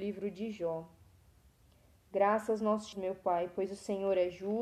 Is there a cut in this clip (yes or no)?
yes